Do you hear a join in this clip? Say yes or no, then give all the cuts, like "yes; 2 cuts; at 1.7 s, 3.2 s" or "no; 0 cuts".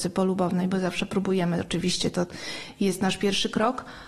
no; 0 cuts